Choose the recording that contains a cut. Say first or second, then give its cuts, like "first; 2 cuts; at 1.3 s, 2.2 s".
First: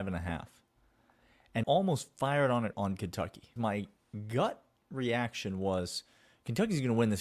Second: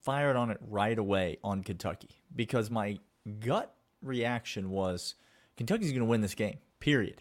first; 3 cuts; at 1.6 s, 2.7 s, 3.6 s